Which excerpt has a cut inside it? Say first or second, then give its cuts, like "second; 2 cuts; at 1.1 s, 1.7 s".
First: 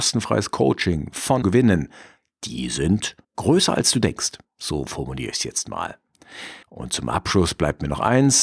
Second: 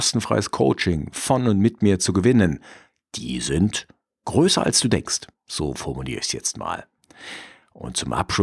first; 3 cuts; at 1.4 s, 3.2 s, 6.6 s